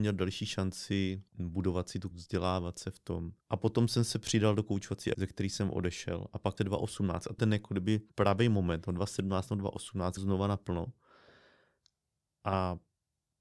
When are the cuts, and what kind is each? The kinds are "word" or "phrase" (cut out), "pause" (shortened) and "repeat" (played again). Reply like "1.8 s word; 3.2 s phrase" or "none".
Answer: 1.3 s pause; 2.1 s word; 3.4 s pause; 5.1 s word; 6.6 s word; 7.4 s word; 8.1 s pause; 10.2 s phrase

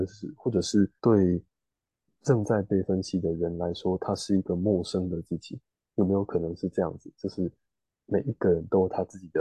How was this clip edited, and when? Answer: 1.0 s pause; 5.7 s pause

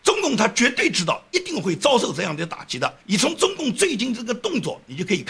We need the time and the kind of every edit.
3.0 s pause

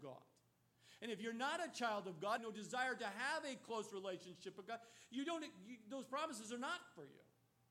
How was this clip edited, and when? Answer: 2.4 s phrase

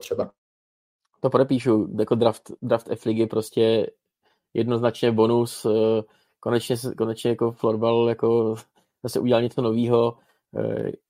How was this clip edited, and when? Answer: none

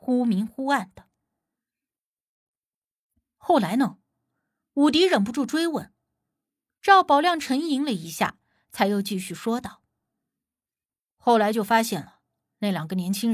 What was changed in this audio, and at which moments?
none

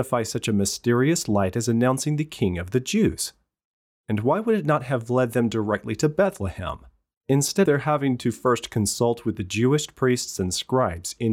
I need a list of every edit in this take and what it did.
7.6 s word

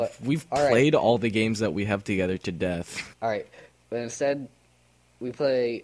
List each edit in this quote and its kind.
3.1 s pause; 3.7 s pause

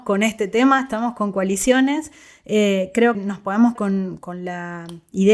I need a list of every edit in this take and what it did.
3.1 s word; 3.8 s word; 4.2 s word

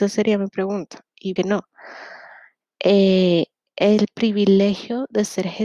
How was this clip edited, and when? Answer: 1.4 s phrase

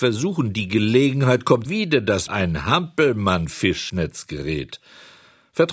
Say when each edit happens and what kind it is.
1.7 s word; 2.3 s word; 3.9 s word

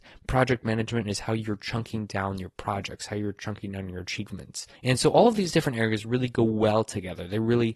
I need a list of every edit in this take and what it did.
4.8 s pause

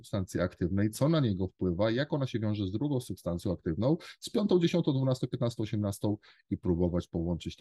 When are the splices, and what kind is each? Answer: none

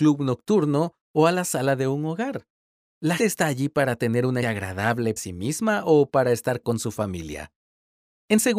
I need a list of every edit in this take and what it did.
3.2 s word; 4.4 s word; 5.2 s word; 6.6 s word

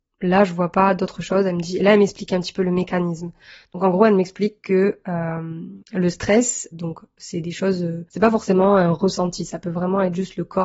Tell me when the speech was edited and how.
5.8 s pause; 6.7 s word; 8.1 s pause

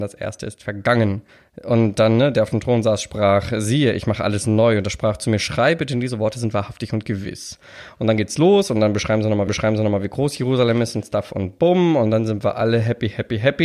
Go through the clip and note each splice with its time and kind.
1.3 s pause; 9.5 s repeat

